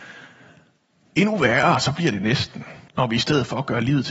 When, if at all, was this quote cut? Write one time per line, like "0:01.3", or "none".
0:02.9

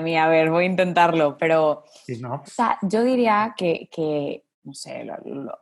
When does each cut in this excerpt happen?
0:02.5
0:04.5

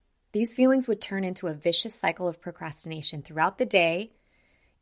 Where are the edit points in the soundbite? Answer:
none

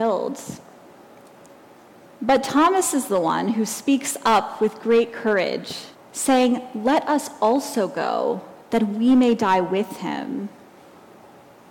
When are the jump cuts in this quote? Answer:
0:05.9
0:08.6

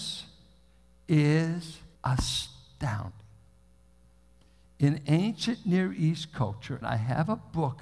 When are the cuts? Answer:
0:01.9
0:06.8

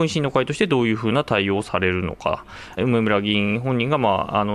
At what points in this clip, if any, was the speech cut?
0:02.8

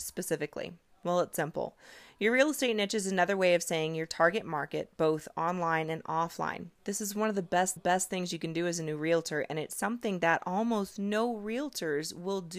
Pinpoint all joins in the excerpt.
0:06.8
0:07.8

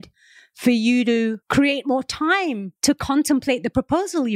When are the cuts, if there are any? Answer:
0:01.4
0:02.8

